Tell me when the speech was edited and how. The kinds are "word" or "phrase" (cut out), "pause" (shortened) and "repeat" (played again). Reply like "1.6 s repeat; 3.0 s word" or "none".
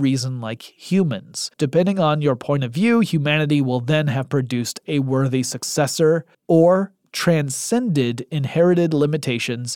1.5 s pause; 6.3 s pause